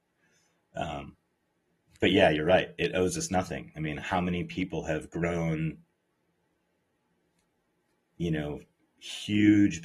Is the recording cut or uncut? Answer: uncut